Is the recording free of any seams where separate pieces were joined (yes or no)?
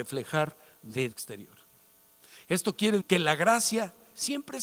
no